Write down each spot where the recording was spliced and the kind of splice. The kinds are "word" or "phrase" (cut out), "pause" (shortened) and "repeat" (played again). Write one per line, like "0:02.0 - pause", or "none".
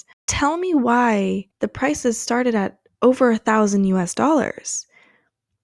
0:01.5 - pause